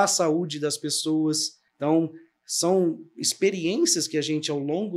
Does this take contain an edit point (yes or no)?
yes